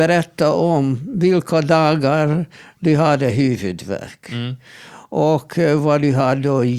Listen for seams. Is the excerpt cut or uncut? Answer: uncut